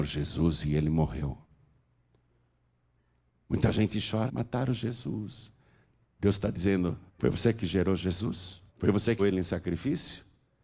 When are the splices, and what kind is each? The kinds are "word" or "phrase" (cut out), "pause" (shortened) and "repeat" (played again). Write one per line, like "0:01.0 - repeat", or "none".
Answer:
0:04.3 - word
0:07.1 - pause
0:08.7 - pause
0:09.2 - word